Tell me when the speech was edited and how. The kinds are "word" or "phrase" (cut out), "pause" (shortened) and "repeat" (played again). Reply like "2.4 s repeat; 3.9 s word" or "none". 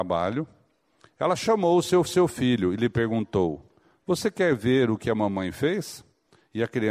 2.0 s repeat